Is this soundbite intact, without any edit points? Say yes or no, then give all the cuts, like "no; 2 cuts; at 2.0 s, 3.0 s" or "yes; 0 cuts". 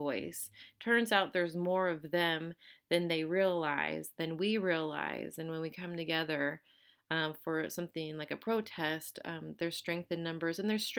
yes; 0 cuts